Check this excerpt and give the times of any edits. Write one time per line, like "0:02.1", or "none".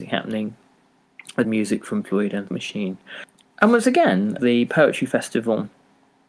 0:01.4
0:02.0
0:02.5
0:04.4